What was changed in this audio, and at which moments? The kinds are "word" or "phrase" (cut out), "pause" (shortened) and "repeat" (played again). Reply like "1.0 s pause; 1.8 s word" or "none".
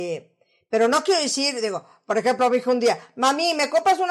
none

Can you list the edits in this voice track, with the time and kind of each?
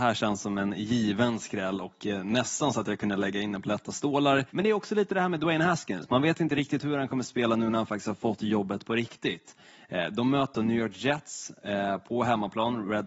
4.5 s pause; 10.5 s word

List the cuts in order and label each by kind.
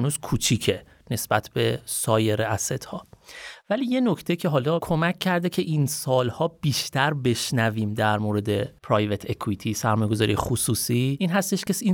8.8 s pause

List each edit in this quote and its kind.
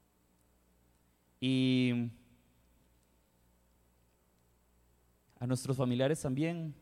none

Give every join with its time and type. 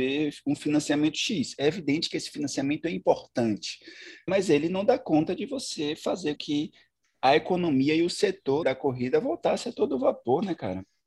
4.3 s word; 6.4 s word; 8.6 s word

